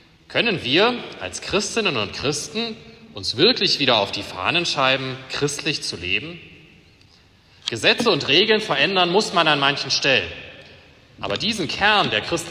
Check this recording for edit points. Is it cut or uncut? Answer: uncut